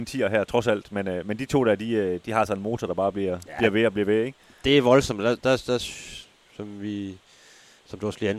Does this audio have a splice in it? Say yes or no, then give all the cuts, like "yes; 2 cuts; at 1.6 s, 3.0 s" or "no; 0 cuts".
no; 0 cuts